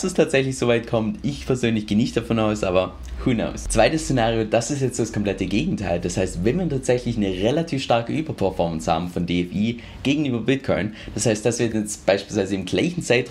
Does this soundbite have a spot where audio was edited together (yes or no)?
no